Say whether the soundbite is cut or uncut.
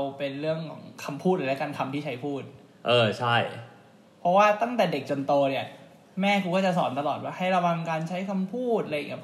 uncut